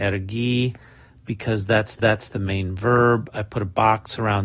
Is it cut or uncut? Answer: cut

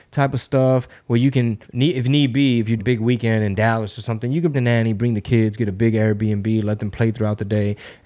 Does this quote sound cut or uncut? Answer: cut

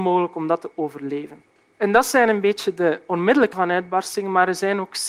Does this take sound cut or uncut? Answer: cut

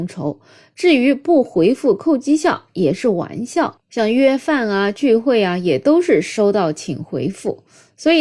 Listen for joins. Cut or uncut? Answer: uncut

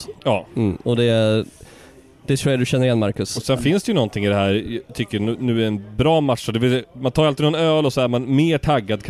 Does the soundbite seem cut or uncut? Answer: uncut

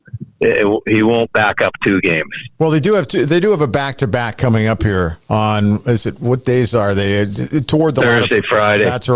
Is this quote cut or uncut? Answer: uncut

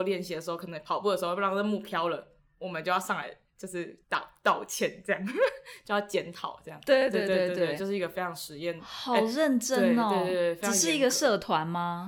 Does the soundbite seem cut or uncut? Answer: cut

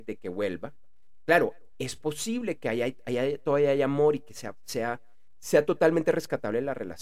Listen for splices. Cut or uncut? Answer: uncut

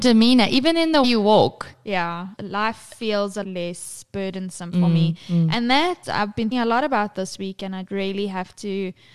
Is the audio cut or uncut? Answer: cut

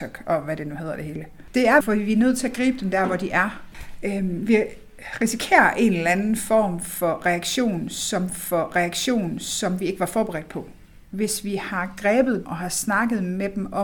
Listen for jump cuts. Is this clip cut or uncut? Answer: cut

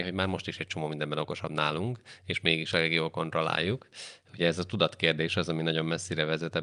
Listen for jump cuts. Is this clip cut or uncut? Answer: uncut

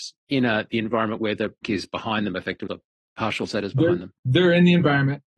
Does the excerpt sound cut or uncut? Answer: cut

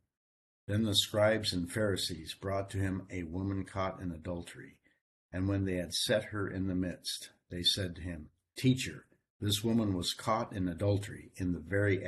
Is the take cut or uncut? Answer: uncut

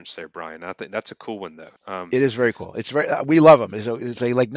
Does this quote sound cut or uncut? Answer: cut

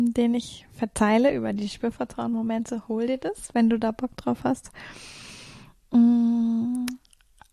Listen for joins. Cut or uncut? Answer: uncut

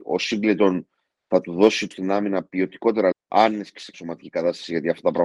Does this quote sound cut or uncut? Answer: cut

